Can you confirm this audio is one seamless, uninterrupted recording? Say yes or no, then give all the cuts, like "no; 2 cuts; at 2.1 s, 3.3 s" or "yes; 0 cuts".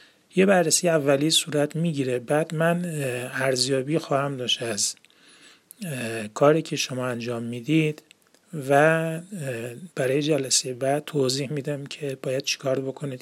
no; 1 cut; at 9.9 s